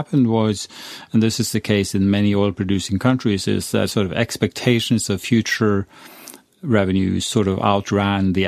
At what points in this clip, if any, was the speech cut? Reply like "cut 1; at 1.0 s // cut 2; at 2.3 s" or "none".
none